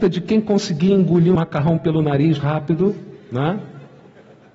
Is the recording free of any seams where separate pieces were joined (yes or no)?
no